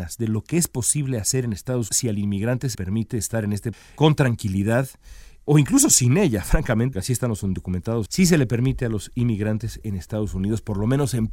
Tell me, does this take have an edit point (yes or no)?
yes